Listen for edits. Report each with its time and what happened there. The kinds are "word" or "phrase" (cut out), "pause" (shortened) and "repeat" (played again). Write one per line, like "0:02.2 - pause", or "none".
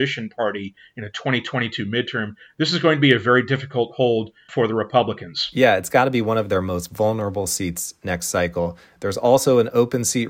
0:04.5 - word